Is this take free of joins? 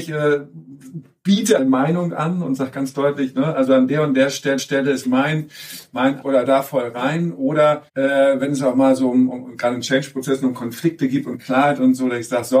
no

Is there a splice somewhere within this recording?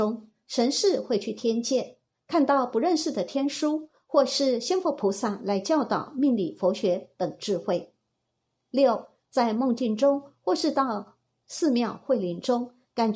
no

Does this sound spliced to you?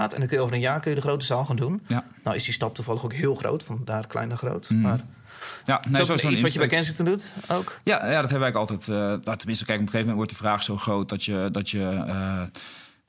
yes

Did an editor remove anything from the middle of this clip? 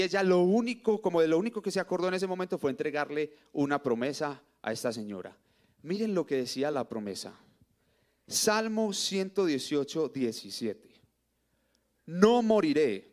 no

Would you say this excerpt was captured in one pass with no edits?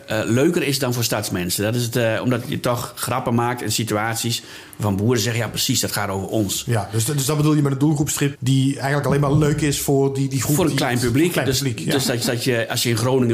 no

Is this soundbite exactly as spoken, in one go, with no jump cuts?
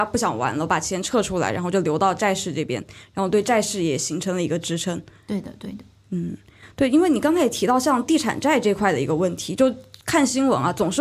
yes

